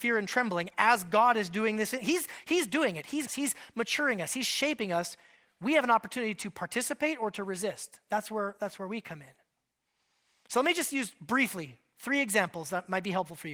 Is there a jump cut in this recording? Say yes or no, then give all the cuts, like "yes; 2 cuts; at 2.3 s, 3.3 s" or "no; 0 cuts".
yes; 1 cut; at 3.3 s